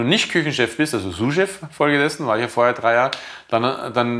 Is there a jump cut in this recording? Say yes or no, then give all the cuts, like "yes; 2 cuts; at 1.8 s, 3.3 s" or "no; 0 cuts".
no; 0 cuts